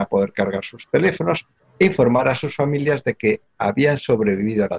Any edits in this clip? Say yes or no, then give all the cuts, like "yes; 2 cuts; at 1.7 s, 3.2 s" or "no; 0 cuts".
no; 0 cuts